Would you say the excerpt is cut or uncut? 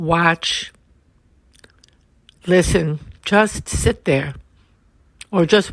cut